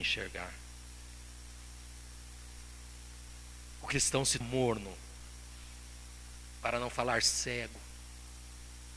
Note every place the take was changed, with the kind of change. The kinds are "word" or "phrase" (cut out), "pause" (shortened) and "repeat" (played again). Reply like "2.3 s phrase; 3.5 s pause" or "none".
4.4 s word